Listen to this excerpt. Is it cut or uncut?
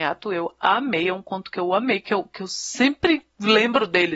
uncut